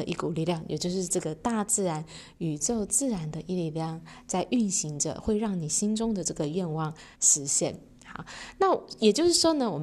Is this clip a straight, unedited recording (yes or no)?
no